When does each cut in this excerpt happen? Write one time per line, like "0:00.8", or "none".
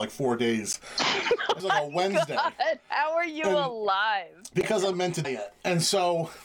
0:01.6
0:04.9
0:05.2